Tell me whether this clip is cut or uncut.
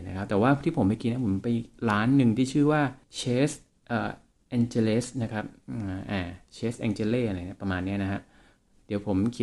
cut